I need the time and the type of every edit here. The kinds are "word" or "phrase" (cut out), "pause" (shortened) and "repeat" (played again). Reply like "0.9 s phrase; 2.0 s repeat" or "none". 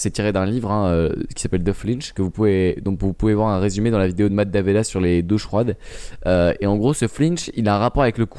none